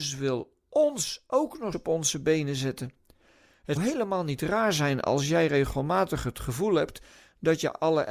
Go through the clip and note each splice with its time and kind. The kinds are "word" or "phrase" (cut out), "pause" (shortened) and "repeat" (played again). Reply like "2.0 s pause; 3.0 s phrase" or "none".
1.7 s word; 3.8 s word